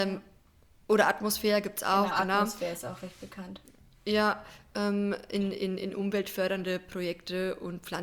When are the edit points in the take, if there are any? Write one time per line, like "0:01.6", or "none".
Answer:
none